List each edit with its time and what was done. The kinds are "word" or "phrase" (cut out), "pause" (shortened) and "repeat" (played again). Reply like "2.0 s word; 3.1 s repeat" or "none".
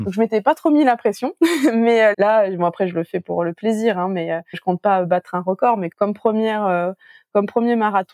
2.1 s word; 4.5 s word; 5.9 s word

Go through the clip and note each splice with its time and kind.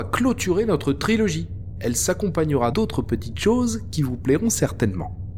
2.7 s word

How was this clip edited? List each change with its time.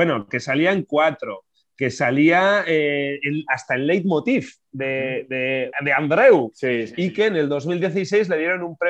5.7 s word

